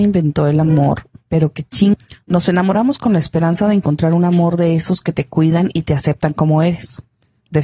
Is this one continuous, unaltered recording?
yes; 0 cuts

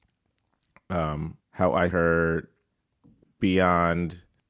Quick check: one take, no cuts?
no; 3 cuts; at 1.4 s, 1.9 s, 3.2 s

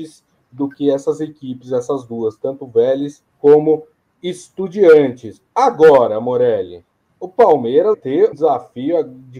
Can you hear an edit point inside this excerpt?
yes; 3 cuts; at 3.3 s, 7.9 s, 8.3 s

